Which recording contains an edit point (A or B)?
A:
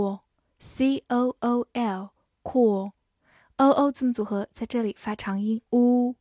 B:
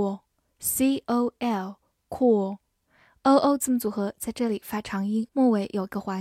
B